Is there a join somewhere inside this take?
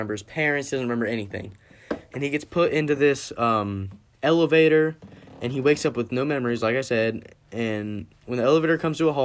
no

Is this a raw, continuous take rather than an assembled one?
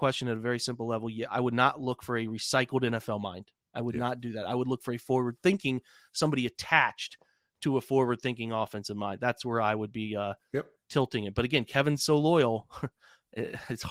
yes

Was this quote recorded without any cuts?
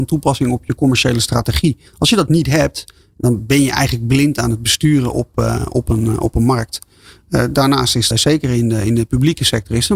no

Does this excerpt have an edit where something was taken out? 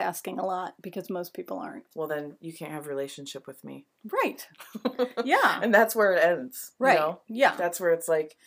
no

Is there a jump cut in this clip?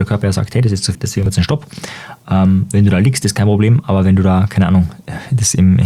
yes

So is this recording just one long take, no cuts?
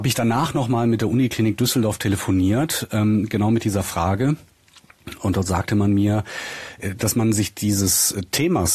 yes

